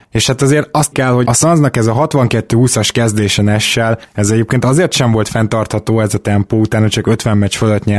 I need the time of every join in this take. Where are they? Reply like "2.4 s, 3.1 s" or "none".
0.9 s, 1.2 s